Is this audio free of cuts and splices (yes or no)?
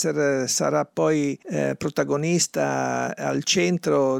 no